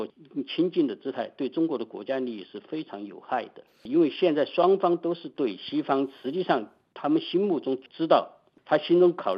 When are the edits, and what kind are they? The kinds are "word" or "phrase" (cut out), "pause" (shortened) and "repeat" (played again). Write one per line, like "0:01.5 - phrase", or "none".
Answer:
0:03.7 - pause